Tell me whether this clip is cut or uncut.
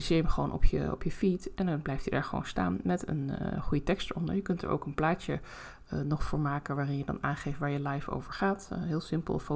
uncut